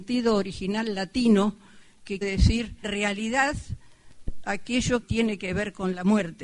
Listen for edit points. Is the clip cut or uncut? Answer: cut